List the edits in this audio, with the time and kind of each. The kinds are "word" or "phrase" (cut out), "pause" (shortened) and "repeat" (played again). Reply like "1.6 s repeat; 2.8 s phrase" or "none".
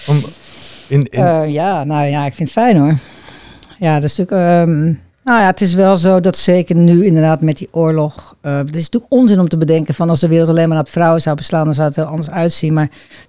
5.1 s pause